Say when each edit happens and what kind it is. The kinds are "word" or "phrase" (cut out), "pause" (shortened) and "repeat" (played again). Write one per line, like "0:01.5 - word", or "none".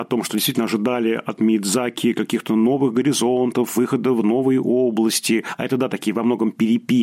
none